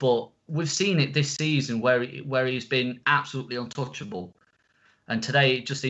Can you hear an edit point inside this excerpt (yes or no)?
no